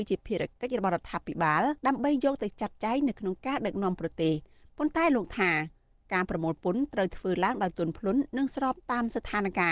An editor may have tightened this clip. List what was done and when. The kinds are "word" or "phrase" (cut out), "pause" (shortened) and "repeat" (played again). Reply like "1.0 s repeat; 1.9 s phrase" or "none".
1.8 s pause

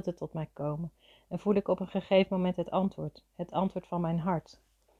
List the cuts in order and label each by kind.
none

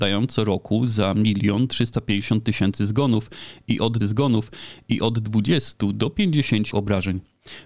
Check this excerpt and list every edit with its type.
4.0 s repeat; 6.7 s phrase

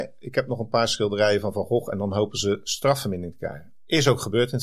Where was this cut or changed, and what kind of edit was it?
none

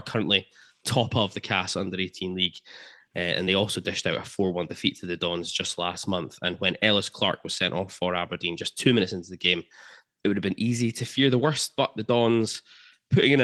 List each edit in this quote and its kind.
none

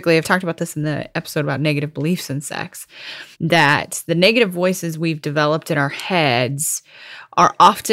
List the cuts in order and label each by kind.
3.3 s pause

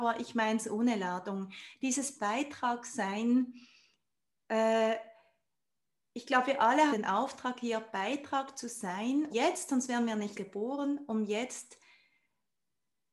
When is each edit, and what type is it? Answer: 6.9 s word; 9.3 s word; 10.3 s word

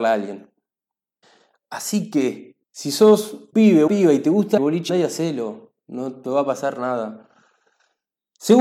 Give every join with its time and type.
1.2 s pause; 2.6 s pause; 3.5 s word; 3.9 s word; 4.6 s phrase; 4.9 s word

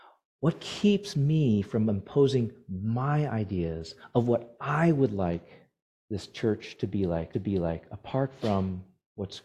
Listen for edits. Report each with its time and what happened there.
7.3 s repeat

